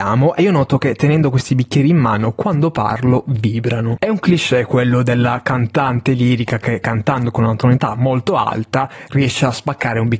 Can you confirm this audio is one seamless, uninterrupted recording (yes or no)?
yes